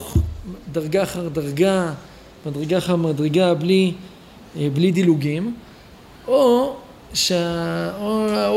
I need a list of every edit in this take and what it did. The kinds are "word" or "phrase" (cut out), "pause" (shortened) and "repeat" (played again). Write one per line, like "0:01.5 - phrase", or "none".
none

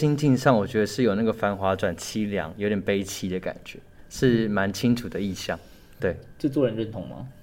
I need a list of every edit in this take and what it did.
0:06.0 - word

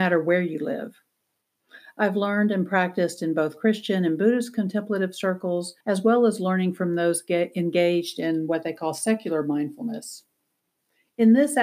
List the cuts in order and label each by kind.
0:05.8 - pause

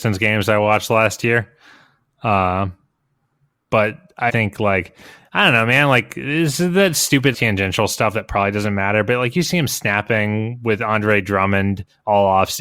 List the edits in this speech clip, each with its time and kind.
0:04.3 - word
0:07.3 - word

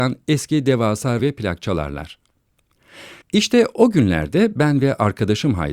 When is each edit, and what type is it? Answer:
0:01.2 - word
0:03.2 - pause

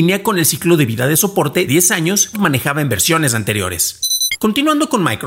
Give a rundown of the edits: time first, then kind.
0:01.7 - word
0:02.3 - word

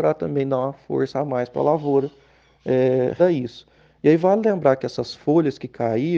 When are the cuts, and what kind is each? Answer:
0:03.2 - word

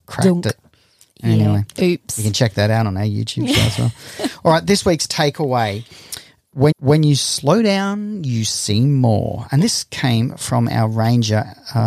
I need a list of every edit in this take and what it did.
0:06.7 - repeat

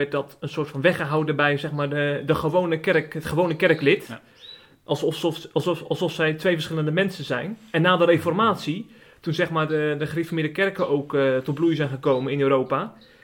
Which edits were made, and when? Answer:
none

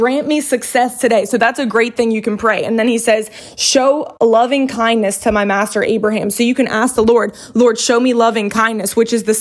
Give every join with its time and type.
none

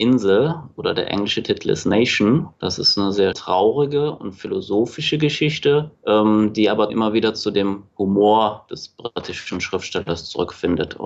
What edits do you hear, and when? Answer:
0:02.5 - pause
0:03.3 - word
0:06.0 - pause
0:06.9 - word

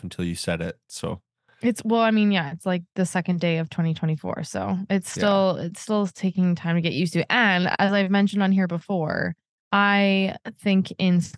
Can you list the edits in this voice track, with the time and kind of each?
none

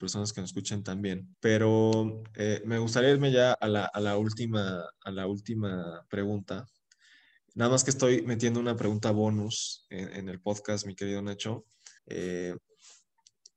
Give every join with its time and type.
0:01.3 - pause
0:03.5 - word
0:12.0 - pause

